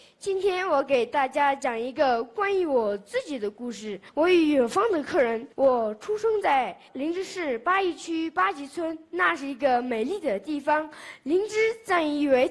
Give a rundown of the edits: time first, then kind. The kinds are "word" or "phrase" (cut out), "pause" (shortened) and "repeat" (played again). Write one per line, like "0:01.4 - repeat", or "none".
0:04.1 - pause
0:05.5 - pause
0:06.9 - pause